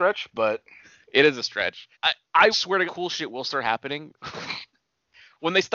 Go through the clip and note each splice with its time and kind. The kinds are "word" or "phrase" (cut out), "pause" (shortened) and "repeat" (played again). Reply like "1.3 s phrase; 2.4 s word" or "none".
1.9 s pause; 2.5 s phrase; 2.9 s word

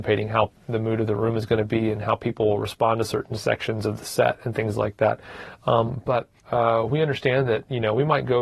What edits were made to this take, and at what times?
6.4 s pause

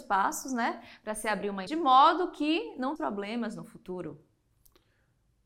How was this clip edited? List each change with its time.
1.7 s word; 3.0 s word

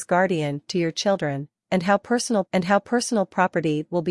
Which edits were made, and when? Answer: 2.4 s repeat

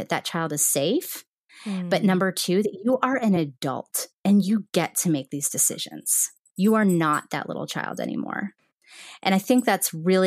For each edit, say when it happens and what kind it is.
none

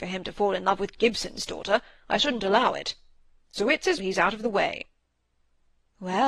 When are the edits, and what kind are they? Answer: 4.0 s word

